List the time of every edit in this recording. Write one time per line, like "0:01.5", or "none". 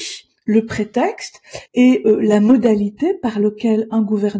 0:01.7